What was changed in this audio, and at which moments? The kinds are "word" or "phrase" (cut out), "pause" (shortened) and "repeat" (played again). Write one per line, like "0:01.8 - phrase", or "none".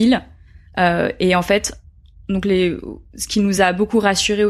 none